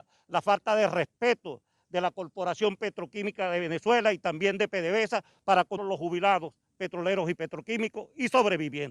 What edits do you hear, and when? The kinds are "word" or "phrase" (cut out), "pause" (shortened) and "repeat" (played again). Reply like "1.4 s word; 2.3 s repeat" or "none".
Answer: 5.8 s word

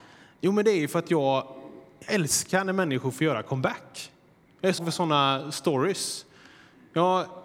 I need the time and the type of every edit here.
4.8 s word

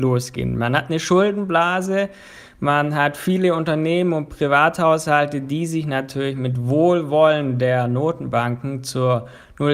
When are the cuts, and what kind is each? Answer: none

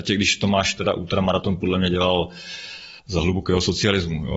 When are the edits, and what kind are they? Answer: 3.0 s pause

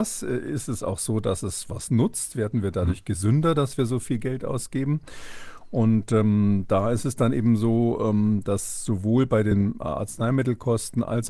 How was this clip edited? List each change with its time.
none

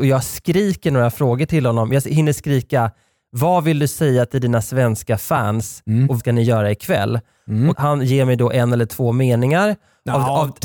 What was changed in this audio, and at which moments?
6.2 s word; 7.7 s word

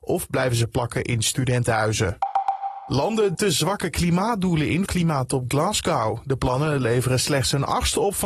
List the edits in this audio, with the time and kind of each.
3.3 s word; 4.9 s word

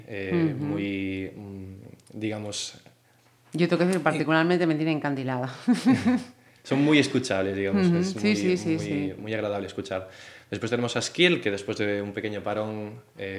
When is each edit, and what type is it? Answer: none

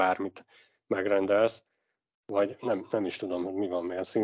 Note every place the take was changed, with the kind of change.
none

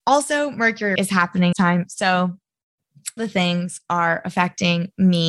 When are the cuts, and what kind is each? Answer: 1.0 s word; 1.5 s phrase; 3.2 s phrase

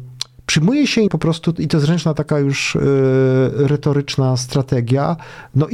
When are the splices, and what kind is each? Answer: 1.1 s phrase; 1.6 s word

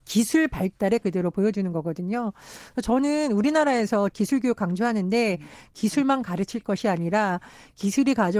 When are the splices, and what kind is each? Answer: 1.0 s word; 4.1 s word

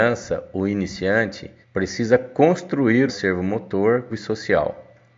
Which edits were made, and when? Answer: 1.6 s pause; 3.1 s phrase; 4.1 s word

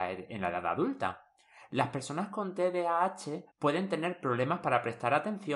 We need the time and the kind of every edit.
3.5 s pause

